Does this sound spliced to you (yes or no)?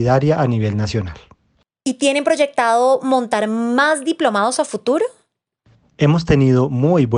no